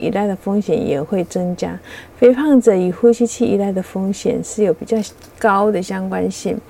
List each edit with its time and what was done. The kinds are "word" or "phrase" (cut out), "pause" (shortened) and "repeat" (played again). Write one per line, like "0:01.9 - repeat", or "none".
none